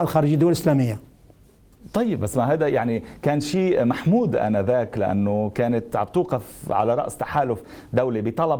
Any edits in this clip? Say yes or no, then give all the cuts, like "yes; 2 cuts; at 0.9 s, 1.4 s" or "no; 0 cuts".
no; 0 cuts